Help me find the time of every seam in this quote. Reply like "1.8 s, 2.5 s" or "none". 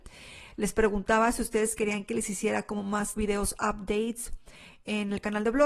3.2 s